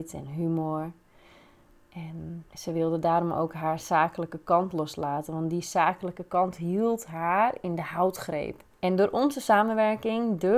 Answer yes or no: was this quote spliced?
yes